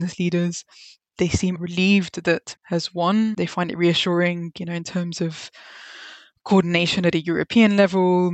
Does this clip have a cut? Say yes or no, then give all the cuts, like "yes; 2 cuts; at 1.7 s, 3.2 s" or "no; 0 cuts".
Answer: yes; 2 cuts; at 1.5 s, 2.6 s